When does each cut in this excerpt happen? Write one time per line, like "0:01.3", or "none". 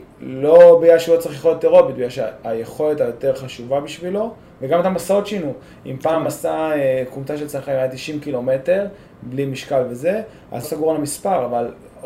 0:10.6